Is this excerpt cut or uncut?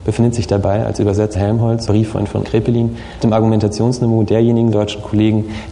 cut